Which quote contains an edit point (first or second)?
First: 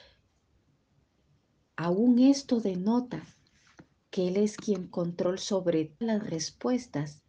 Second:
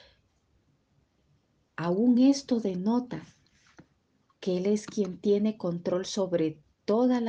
first